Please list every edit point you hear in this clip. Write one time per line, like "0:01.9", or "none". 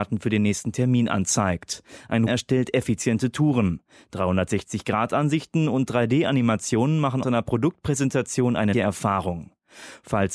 0:02.3
0:07.2
0:08.7